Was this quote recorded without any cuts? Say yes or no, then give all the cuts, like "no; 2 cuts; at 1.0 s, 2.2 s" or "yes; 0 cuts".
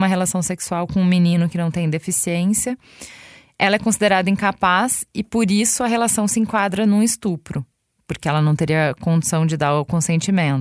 yes; 0 cuts